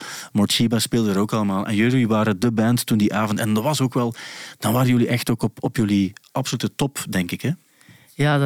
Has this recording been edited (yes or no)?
no